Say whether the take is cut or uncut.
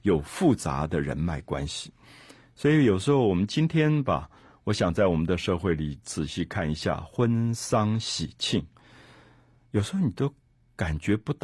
uncut